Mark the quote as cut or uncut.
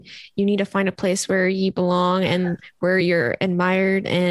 uncut